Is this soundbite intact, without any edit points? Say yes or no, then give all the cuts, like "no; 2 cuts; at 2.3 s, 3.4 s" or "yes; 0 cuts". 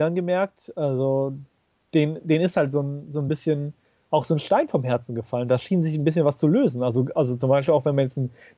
yes; 0 cuts